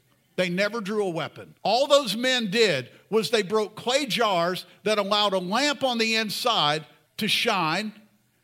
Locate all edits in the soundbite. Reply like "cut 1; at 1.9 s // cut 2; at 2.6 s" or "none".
cut 1; at 1.6 s // cut 2; at 7.1 s

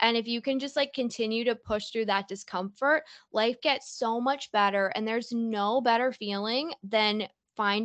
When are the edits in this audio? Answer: none

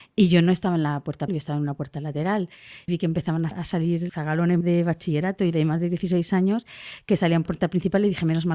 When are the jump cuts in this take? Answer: cut 1; at 1.3 s // cut 2; at 2.9 s // cut 3; at 3.5 s // cut 4; at 4.1 s // cut 5; at 4.6 s // cut 6; at 5.5 s // cut 7; at 7.5 s

